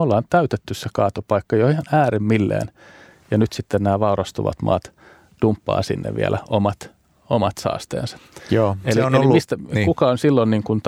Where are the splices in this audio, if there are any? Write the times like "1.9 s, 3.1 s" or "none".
none